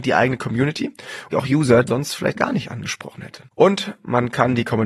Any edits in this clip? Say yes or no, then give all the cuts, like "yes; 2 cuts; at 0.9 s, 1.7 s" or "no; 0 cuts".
yes; 4 cuts; at 1.3 s, 1.9 s, 2.4 s, 3.5 s